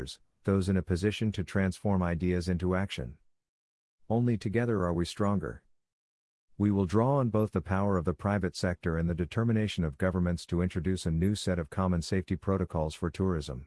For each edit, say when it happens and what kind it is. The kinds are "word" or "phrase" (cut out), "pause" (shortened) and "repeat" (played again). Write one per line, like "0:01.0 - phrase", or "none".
none